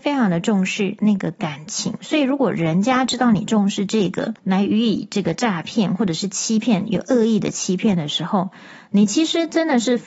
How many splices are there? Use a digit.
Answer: 1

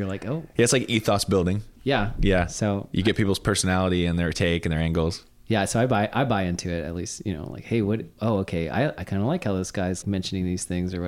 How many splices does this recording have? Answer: 2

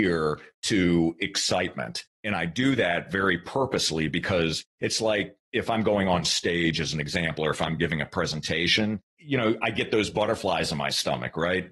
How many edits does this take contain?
0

